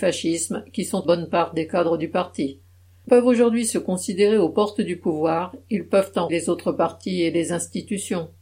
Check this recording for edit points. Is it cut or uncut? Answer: cut